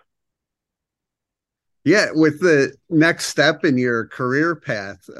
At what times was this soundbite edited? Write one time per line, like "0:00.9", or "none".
none